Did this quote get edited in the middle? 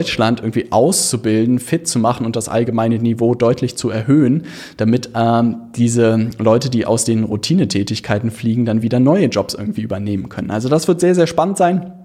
no; 0 cuts

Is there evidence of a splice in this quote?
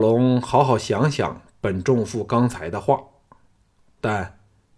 no; 0 cuts

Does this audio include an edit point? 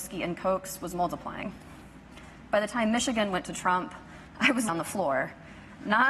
yes; 1 cut; at 4.7 s

